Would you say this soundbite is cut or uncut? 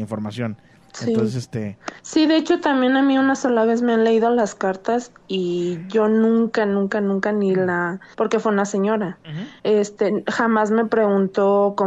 cut